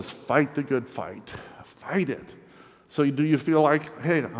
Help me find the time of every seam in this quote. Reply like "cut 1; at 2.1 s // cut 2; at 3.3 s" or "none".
none